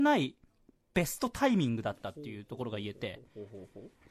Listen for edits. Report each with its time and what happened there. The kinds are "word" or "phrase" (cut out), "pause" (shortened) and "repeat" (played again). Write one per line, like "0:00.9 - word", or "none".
none